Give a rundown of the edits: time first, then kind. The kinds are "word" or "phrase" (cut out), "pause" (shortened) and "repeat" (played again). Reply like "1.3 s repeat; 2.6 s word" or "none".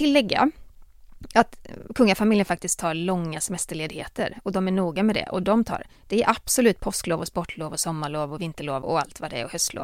5.9 s pause; 8.8 s word